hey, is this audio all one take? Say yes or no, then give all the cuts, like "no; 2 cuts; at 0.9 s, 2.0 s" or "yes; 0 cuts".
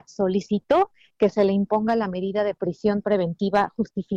yes; 0 cuts